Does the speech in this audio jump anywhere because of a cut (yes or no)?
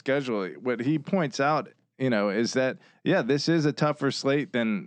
no